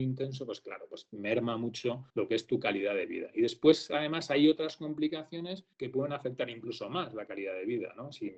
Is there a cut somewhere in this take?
yes; 2 cuts; at 2.1 s, 5.7 s

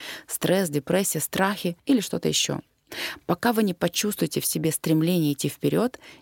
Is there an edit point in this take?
yes; 1 cut; at 1.8 s

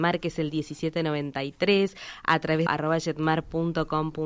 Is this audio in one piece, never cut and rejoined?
no; 1 cut; at 2.7 s

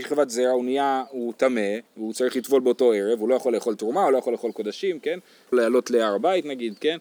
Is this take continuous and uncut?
no; 2 cuts; at 1.9 s, 5.5 s

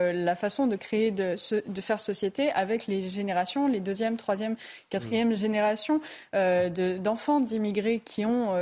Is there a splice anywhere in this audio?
no; 0 cuts

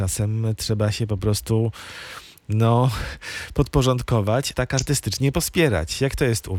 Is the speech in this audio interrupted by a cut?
yes; 1 cut; at 4.5 s

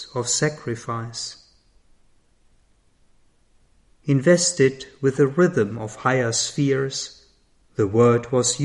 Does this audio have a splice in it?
no; 0 cuts

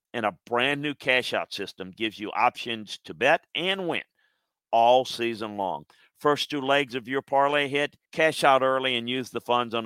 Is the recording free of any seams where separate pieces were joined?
no; 1 cut; at 8.1 s

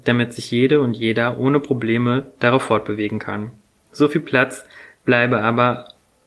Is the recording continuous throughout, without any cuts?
yes; 0 cuts

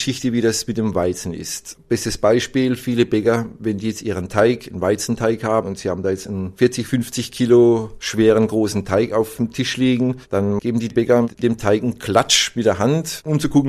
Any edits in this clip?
no; 0 cuts

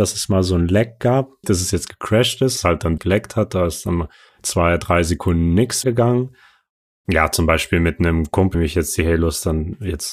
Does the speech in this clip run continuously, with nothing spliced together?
no; 6 cuts; at 1.4 s, 2.6 s, 3.0 s, 4.3 s, 5.8 s, 8.5 s

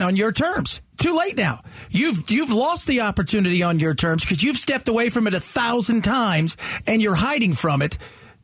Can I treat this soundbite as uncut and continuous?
yes; 0 cuts

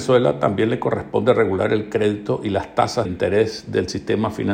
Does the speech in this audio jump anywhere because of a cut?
yes; 1 cut; at 3.1 s

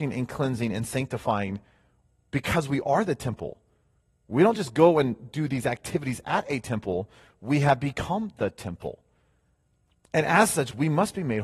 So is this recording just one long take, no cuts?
yes; 0 cuts

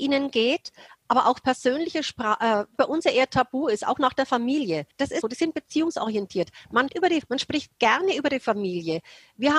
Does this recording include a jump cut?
yes; 5 cuts; at 2.8 s, 4.9 s, 5.2 s, 6.9 s, 7.2 s

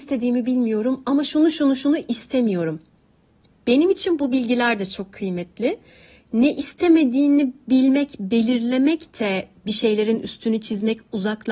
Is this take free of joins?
yes; 0 cuts

